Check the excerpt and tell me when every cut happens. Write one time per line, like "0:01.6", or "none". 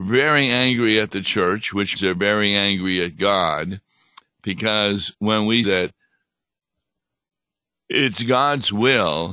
0:02.0
0:05.6